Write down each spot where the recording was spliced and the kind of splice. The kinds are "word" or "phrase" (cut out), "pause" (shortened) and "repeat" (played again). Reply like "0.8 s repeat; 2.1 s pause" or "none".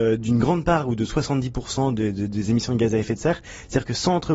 none